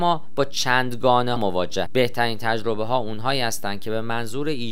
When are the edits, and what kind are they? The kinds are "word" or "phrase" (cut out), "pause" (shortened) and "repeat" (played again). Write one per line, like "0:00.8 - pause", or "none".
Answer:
0:01.4 - word
0:01.9 - word

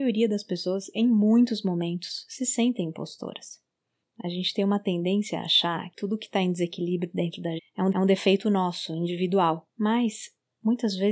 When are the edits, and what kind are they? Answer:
0:04.0 - pause
0:05.9 - word
0:07.6 - word
0:07.9 - repeat
0:09.7 - pause

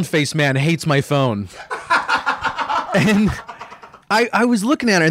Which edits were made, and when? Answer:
0:04.0 - pause

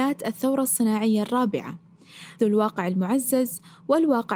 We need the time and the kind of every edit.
0:02.4 - word

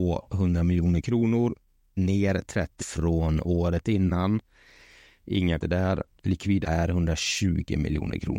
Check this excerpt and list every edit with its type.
0:02.8 - word
0:05.6 - word
0:06.6 - word

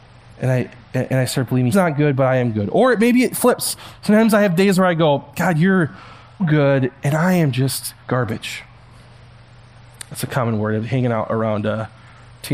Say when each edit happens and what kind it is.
0:01.7 - word
0:06.4 - word
0:08.0 - pause

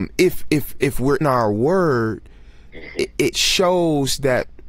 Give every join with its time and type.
0:01.2 - word
0:03.3 - word

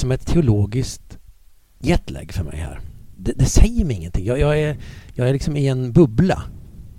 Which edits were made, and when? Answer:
none

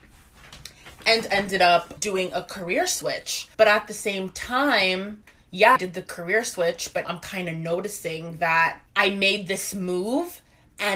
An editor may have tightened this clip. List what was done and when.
0:02.0 - word
0:03.5 - pause
0:05.8 - word
0:07.0 - word
0:08.9 - pause

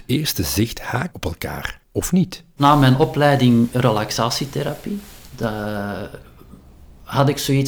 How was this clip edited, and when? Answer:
0:01.1 - word
0:01.8 - pause

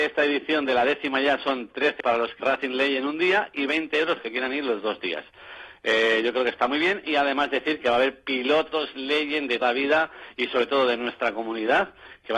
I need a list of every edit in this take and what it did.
0:02.0 - word
0:02.4 - word
0:04.2 - word
0:09.6 - word

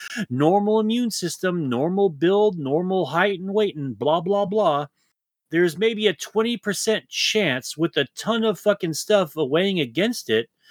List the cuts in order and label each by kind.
none

